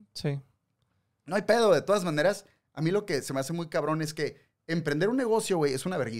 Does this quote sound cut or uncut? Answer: uncut